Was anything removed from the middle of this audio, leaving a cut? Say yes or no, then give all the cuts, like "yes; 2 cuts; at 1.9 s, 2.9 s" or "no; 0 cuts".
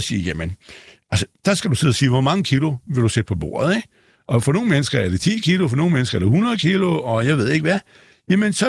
no; 0 cuts